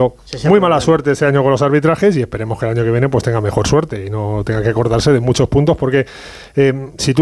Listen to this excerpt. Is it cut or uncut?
uncut